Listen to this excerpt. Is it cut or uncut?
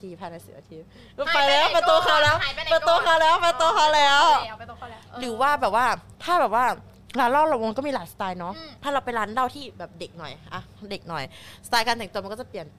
cut